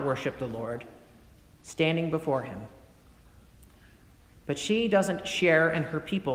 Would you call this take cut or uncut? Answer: uncut